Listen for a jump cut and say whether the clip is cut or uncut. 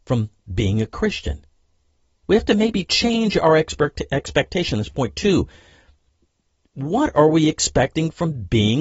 uncut